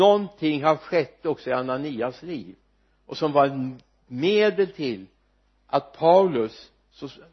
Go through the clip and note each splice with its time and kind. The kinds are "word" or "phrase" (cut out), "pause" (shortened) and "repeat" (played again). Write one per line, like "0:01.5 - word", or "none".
none